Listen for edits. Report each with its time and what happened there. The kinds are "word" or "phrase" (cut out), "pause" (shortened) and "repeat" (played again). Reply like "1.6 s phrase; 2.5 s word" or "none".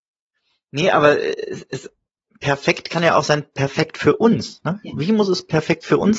none